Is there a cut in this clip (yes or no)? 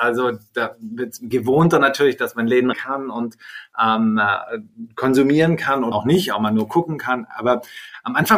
yes